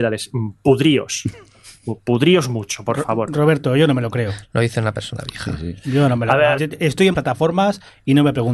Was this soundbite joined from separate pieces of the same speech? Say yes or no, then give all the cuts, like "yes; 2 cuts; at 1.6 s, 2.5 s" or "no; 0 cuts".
yes; 2 cuts; at 6.6 s, 7.1 s